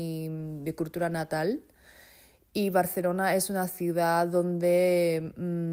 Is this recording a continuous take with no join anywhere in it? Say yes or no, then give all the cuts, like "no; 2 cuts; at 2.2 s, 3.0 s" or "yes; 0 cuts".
yes; 0 cuts